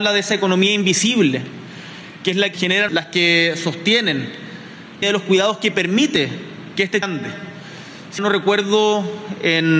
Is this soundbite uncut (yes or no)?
no